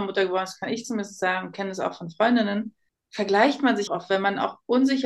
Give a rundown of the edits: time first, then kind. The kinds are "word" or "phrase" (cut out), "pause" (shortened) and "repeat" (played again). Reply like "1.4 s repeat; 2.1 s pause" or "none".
2.9 s pause; 3.9 s word